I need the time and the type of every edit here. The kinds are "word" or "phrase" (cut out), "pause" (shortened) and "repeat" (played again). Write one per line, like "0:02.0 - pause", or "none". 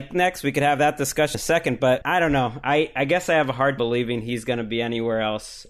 0:01.3 - word
0:02.0 - word
0:03.8 - word